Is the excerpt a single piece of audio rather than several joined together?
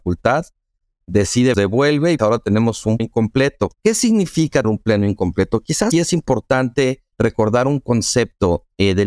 no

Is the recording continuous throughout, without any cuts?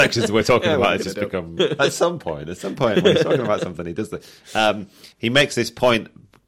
no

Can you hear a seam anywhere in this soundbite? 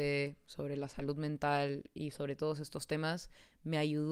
no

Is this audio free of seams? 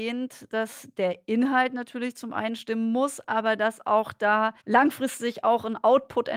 no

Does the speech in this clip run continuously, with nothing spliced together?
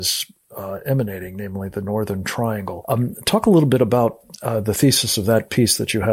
yes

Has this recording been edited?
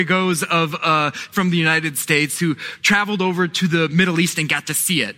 yes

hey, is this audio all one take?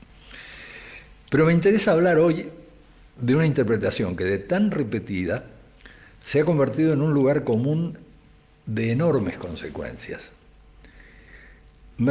yes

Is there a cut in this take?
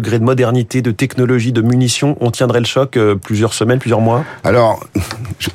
no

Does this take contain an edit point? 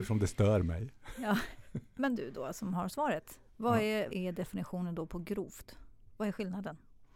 yes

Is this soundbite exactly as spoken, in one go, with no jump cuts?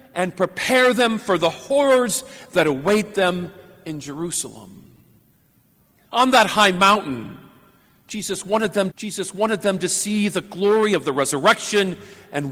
no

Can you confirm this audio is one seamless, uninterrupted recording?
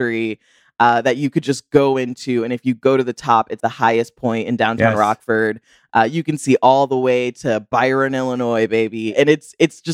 no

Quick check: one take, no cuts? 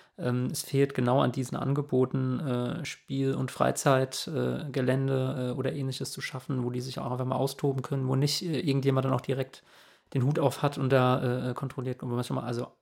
yes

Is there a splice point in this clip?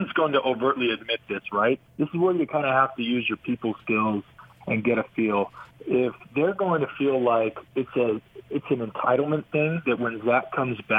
yes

